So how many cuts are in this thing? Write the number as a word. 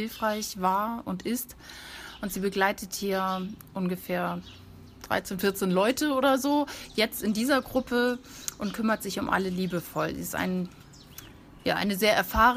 zero